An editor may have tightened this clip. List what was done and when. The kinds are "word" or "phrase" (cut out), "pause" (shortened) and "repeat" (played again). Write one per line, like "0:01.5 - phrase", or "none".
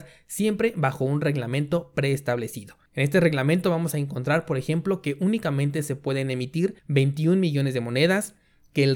0:02.9 - pause
0:06.8 - pause